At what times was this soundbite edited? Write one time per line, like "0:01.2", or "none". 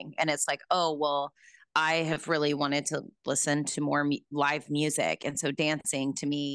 none

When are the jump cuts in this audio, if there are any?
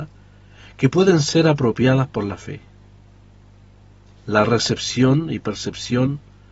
none

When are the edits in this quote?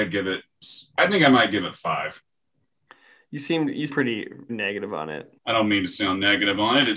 0:03.9
0:04.5
0:05.4

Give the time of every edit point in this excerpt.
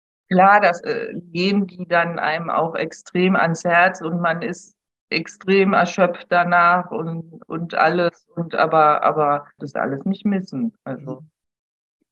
0:09.6

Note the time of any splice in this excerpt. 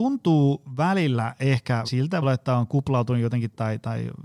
0:01.8
0:02.2

